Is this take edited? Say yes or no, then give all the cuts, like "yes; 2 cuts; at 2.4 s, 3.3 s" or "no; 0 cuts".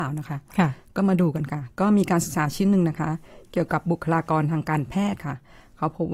no; 0 cuts